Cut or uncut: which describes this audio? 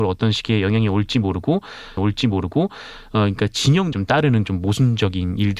cut